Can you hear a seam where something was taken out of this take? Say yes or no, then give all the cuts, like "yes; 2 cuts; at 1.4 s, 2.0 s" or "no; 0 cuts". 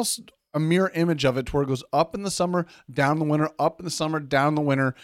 no; 0 cuts